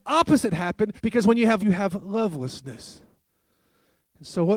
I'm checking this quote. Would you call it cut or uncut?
cut